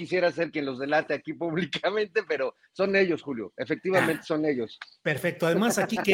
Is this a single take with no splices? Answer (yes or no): yes